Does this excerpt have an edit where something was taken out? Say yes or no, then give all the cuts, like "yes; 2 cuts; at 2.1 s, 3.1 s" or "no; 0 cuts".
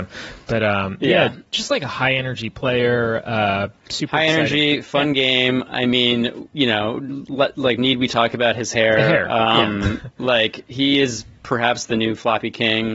no; 0 cuts